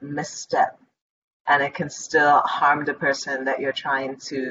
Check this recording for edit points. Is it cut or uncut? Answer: uncut